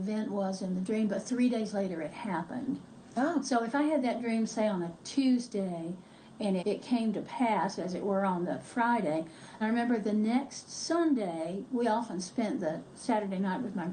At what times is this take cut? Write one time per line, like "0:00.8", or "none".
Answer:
0:06.6
0:09.6

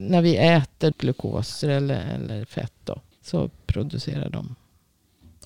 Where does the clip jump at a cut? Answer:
0:00.9
0:01.6
0:03.1

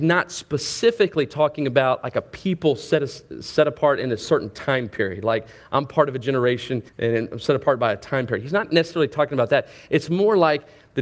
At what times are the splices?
0:06.9

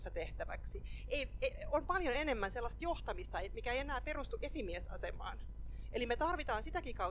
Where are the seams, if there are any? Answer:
none

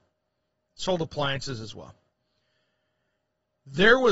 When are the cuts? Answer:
none

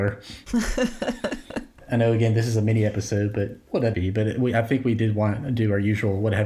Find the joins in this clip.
0:03.9

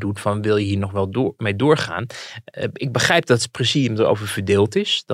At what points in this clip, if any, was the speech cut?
none

